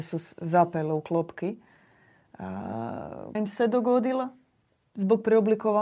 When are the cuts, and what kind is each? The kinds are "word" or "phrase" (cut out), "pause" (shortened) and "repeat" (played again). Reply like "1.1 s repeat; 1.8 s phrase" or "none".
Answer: 3.3 s word